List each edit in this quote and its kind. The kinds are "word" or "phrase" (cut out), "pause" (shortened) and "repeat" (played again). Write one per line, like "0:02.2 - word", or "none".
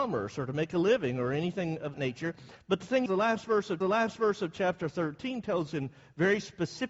0:01.9 - word
0:03.1 - word
0:03.8 - repeat
0:05.7 - word